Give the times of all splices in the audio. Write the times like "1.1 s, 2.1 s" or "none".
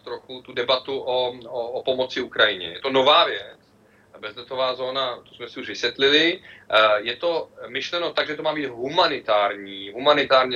none